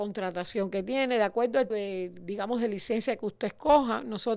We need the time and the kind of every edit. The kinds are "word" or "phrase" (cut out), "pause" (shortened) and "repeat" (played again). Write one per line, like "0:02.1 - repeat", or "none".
0:01.7 - word